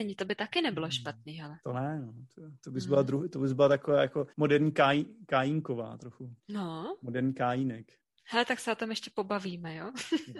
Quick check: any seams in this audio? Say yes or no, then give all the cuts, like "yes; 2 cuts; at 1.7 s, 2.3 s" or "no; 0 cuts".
yes; 3 cuts; at 4.3 s, 6.4 s, 8.0 s